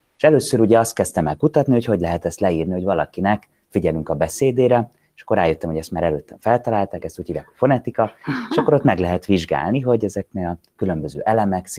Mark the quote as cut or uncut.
uncut